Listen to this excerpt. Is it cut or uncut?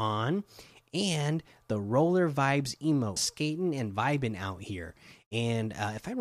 cut